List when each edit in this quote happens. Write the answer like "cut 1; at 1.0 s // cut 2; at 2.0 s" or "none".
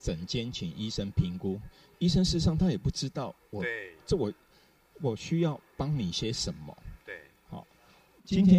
none